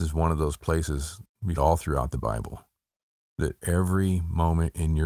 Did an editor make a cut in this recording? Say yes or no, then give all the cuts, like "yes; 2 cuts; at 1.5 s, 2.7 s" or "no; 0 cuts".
yes; 2 cuts; at 1.6 s, 3.6 s